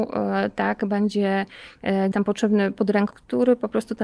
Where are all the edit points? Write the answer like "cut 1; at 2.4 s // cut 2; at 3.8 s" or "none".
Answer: cut 1; at 2.1 s // cut 2; at 3.1 s

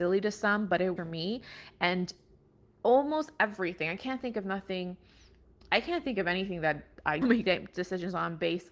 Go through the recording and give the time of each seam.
cut 1; at 1.0 s // cut 2; at 7.2 s

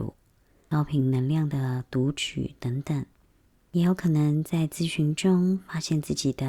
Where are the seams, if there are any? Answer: cut 1; at 3.2 s

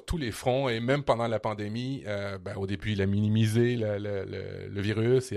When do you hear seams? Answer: none

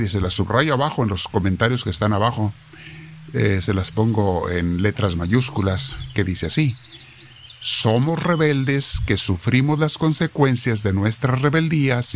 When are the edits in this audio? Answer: none

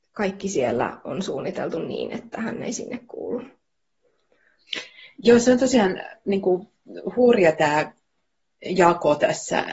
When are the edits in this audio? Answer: none

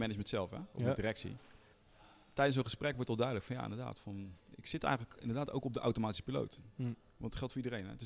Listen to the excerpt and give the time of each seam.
cut 1; at 1.7 s // cut 2; at 4.4 s

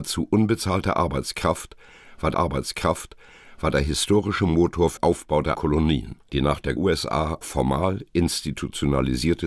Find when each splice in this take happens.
cut 1; at 2.3 s // cut 2; at 5.0 s // cut 3; at 5.5 s // cut 4; at 6.3 s // cut 5; at 6.8 s // cut 6; at 7.4 s

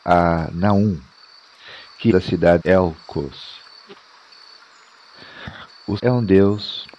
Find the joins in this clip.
cut 1; at 2.1 s // cut 2; at 2.6 s // cut 3; at 6.0 s

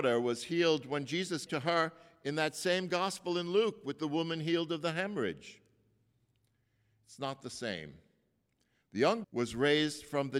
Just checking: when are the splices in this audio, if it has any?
cut 1; at 1.5 s // cut 2; at 9.2 s

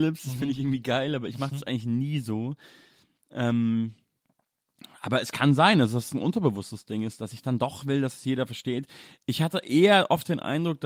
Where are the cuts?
none

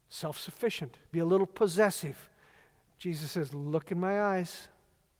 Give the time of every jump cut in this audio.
cut 1; at 1.1 s

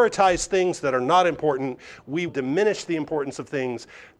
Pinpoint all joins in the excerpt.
cut 1; at 2.3 s

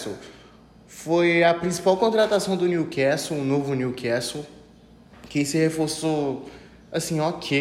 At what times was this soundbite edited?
none

